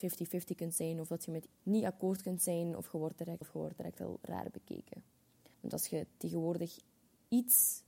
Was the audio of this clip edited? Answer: yes; 3 cuts; at 1.5 s, 3.4 s, 5.5 s

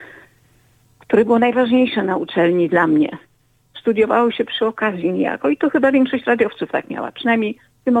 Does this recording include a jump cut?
no; 0 cuts

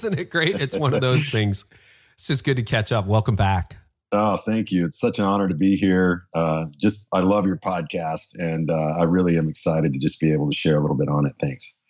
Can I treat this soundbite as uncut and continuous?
yes; 0 cuts

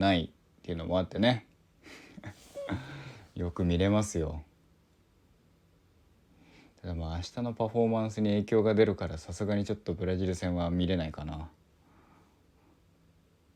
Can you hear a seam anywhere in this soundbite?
no; 0 cuts

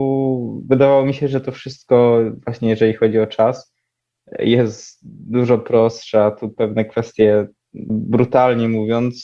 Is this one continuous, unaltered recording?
no; 1 cut; at 7.9 s

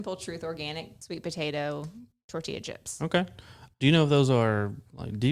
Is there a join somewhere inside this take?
no; 0 cuts

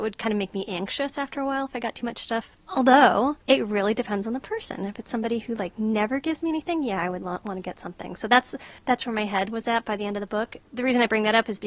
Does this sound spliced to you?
no; 0 cuts

